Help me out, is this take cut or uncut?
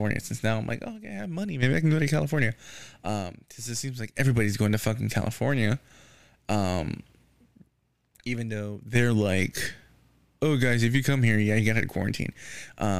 uncut